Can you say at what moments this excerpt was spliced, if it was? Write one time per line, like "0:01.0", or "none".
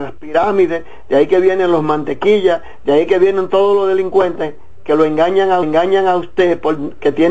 0:05.6